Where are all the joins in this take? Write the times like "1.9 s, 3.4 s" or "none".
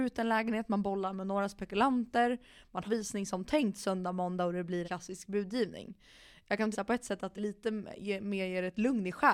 2.9 s, 4.8 s, 6.7 s, 7.4 s

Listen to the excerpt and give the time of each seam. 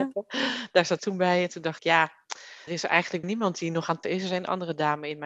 1.0 s, 1.8 s, 2.7 s, 3.2 s, 4.0 s

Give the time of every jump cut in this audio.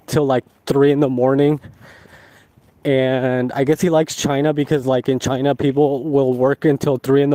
none

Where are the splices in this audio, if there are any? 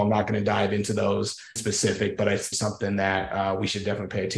1.6 s, 2.5 s

